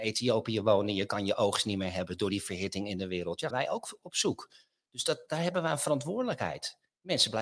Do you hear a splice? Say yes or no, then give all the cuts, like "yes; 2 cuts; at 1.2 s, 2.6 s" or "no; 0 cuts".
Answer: yes; 1 cut; at 3.5 s